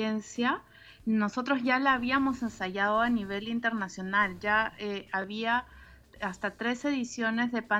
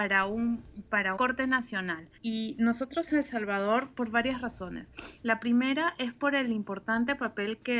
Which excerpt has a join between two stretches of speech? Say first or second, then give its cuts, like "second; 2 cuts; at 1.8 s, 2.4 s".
second; 4 cuts; at 1.2 s, 2.2 s, 3.1 s, 5.2 s